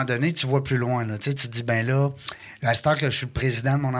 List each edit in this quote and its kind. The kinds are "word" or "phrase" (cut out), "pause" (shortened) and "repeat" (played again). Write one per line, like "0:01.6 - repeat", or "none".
none

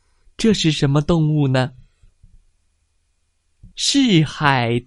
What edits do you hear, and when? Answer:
0:03.7 - pause

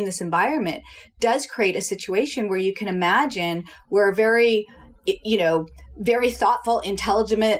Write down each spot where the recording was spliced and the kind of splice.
none

